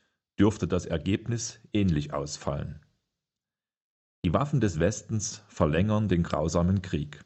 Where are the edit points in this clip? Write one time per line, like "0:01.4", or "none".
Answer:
none